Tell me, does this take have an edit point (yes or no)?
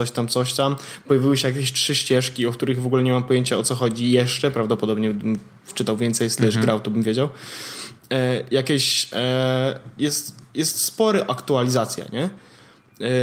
no